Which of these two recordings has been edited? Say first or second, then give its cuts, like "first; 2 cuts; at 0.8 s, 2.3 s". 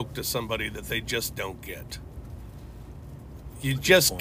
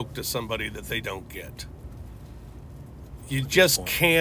second; 1 cut; at 1.0 s